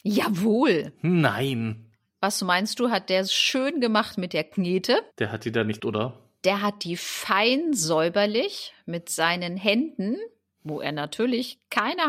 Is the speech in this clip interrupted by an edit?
yes; 2 cuts; at 5.1 s, 5.8 s

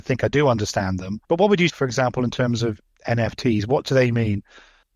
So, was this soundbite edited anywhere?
yes; 2 cuts; at 1.2 s, 1.7 s

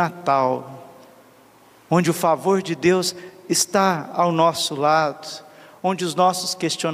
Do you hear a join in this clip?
no; 0 cuts

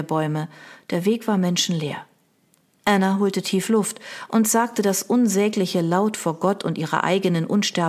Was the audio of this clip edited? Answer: no; 0 cuts

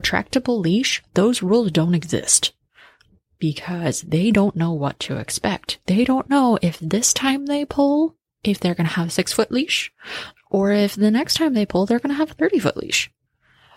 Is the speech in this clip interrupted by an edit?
no; 0 cuts

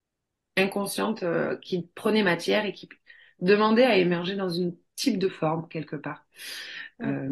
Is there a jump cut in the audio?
no; 0 cuts

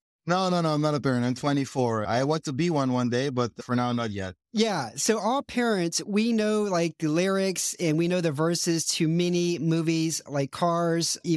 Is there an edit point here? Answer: no; 0 cuts

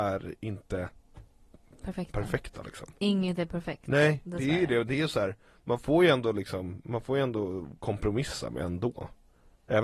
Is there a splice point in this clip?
no; 0 cuts

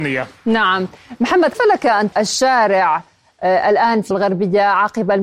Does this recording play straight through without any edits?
no; 3 cuts; at 1.5 s, 2.1 s, 4.1 s

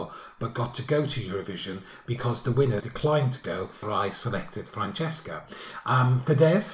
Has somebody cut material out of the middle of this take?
yes; 2 cuts; at 2.8 s, 3.8 s

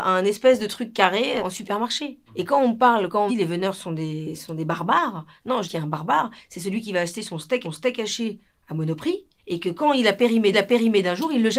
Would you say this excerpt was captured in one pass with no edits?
no; 7 cuts; at 1.4 s, 2.3 s, 3.3 s, 5.6 s, 7.6 s, 9.4 s, 10.5 s

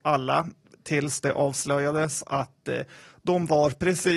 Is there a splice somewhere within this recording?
no; 0 cuts

